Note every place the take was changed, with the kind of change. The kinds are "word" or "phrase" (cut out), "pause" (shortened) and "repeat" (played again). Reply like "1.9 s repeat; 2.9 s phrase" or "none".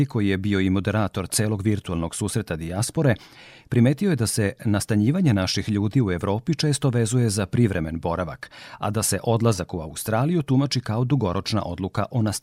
none

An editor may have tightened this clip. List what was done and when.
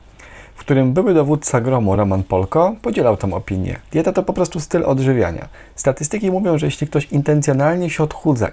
none

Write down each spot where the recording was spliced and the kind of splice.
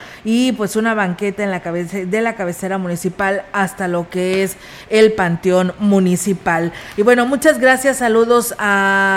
none

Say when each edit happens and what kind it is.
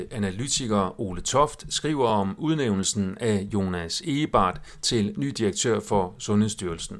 none

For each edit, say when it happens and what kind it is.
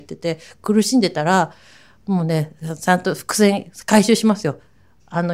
none

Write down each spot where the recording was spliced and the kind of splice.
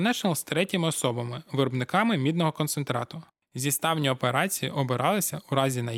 none

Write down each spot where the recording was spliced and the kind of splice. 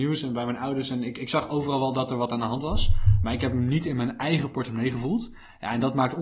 none

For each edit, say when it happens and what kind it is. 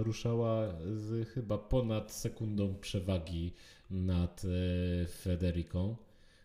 none

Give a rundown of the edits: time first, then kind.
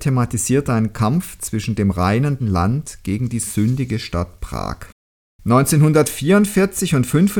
2.4 s word; 5.2 s pause

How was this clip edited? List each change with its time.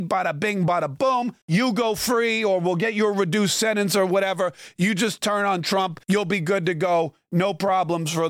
1.4 s pause; 6.0 s pause

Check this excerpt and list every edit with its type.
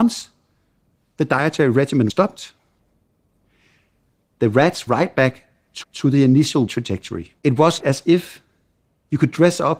2.1 s word; 4.9 s word; 5.8 s repeat; 6.7 s word; 7.4 s pause; 7.8 s word

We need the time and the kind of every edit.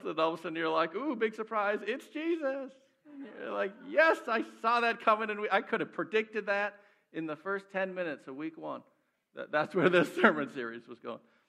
none

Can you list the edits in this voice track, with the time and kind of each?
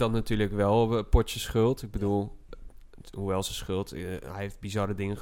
none

